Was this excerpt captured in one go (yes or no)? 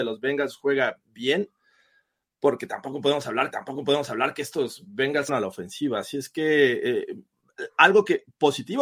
no